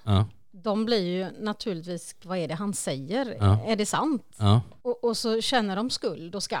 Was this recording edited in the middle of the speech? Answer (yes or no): yes